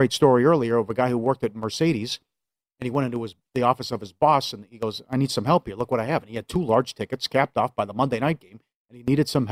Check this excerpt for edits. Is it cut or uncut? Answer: uncut